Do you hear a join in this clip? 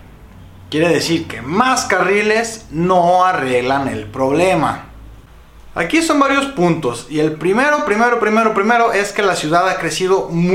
no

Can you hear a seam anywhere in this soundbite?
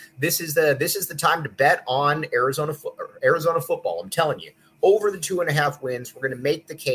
no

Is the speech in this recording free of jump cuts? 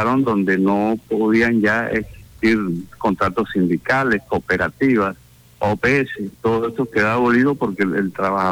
no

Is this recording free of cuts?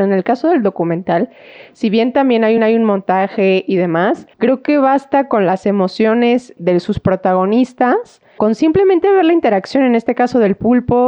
no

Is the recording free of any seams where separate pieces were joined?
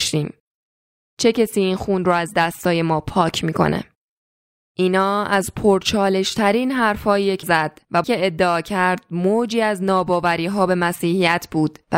no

